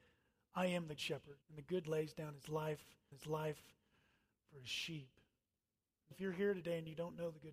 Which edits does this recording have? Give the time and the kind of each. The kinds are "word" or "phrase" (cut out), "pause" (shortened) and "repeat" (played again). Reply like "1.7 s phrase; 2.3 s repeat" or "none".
1.0 s word; 1.4 s pause; 1.8 s word; 3.1 s repeat; 6.1 s word